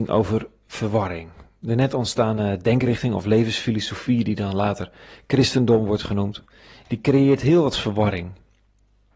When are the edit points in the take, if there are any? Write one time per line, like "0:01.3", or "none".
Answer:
none